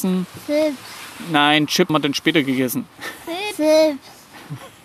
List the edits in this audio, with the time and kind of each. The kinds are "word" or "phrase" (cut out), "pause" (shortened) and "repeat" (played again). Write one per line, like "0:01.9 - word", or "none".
0:01.9 - word